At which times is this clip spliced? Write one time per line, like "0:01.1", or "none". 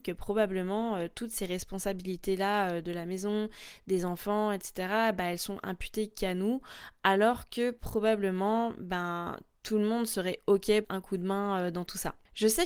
0:10.8